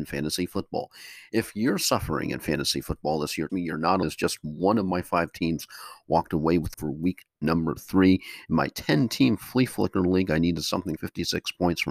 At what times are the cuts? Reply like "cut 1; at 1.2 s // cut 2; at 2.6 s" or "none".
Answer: cut 1; at 3.5 s // cut 2; at 4.0 s // cut 3; at 6.7 s // cut 4; at 11.0 s